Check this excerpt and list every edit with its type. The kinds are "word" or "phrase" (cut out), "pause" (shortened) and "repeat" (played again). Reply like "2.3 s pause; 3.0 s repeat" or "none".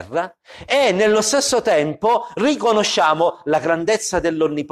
none